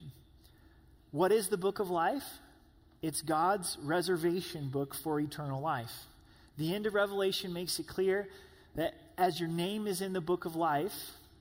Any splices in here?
no; 0 cuts

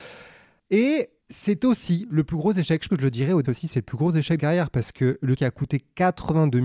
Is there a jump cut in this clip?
yes; 4 cuts; at 2.9 s, 3.4 s, 4.4 s, 5.4 s

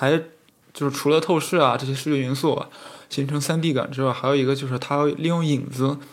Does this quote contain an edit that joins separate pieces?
no; 0 cuts

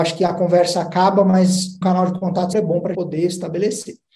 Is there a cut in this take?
yes; 3 cuts; at 1.8 s, 2.5 s, 2.9 s

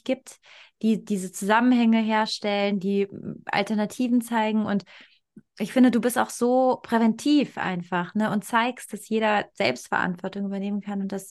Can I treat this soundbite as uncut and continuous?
yes; 0 cuts

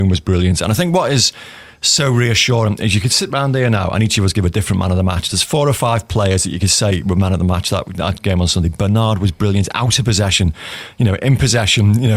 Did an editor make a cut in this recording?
yes; 1 cut; at 3.0 s

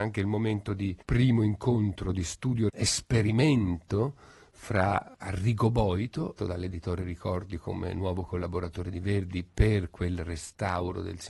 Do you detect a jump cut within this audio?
yes; 3 cuts; at 1.0 s, 2.7 s, 6.4 s

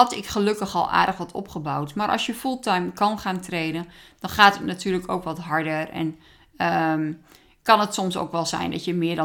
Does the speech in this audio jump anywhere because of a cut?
no; 0 cuts

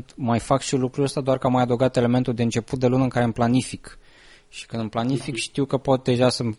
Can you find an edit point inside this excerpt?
no; 0 cuts

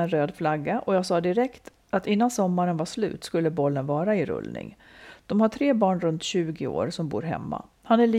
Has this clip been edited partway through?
no; 0 cuts

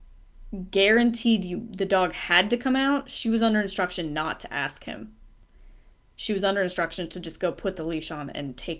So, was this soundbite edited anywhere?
no; 0 cuts

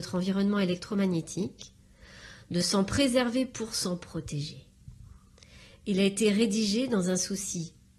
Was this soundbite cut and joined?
no; 0 cuts

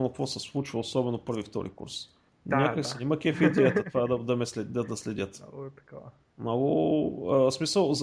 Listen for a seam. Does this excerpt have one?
yes; 2 cuts; at 2.3 s, 6.2 s

